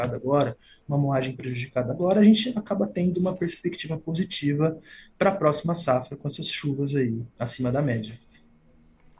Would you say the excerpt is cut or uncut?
cut